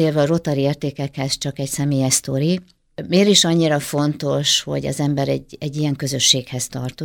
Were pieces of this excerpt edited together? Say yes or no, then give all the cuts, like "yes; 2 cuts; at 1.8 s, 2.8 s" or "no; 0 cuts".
no; 0 cuts